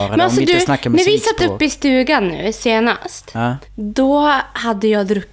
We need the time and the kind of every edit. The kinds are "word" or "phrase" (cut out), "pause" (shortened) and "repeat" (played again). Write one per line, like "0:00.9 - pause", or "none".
none